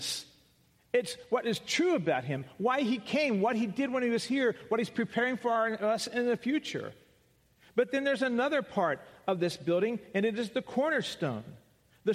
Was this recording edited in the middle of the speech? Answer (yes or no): no